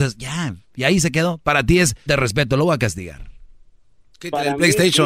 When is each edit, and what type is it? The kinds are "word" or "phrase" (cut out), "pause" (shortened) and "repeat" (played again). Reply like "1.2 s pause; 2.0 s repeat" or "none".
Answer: 2.1 s word